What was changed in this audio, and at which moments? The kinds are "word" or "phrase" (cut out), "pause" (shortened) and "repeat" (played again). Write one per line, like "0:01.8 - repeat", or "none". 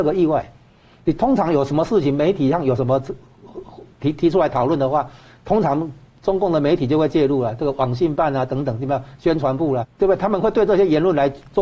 0:09.8 - word